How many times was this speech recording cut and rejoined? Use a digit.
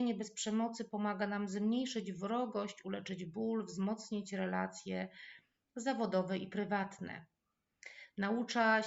0